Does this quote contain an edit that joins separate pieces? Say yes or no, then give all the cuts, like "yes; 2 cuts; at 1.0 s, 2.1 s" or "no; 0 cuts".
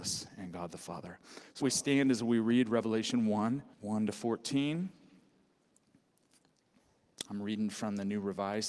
yes; 2 cuts; at 1.6 s, 3.7 s